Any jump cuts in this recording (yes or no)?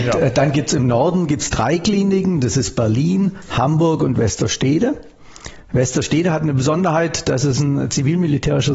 no